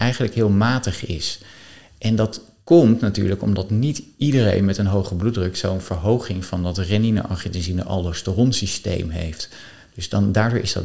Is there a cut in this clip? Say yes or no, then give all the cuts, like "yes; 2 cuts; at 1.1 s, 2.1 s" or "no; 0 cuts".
no; 0 cuts